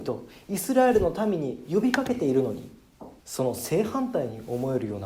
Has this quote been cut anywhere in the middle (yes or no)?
yes